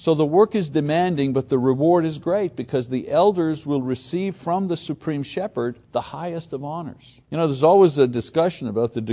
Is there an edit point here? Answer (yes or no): yes